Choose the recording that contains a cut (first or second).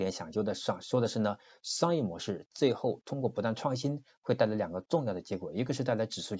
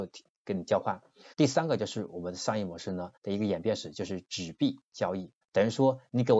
second